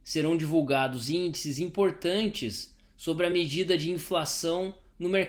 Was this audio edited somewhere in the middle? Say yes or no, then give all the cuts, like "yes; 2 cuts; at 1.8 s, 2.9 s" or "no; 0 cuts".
no; 0 cuts